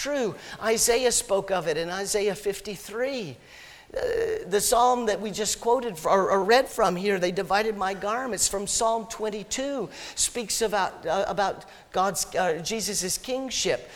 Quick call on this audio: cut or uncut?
uncut